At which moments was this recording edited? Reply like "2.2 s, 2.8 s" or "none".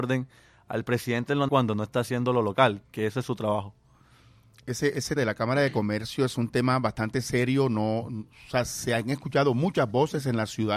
1.5 s, 5.2 s